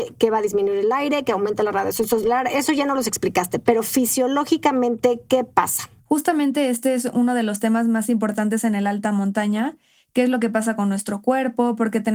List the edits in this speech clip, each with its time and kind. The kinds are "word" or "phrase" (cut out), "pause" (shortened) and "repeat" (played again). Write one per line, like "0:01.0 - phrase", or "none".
none